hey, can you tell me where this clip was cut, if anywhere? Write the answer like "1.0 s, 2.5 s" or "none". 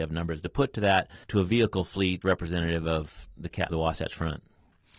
1.2 s, 2.2 s, 3.7 s